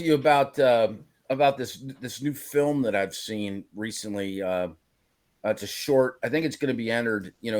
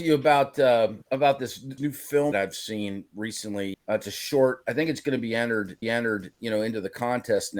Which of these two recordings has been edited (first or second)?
second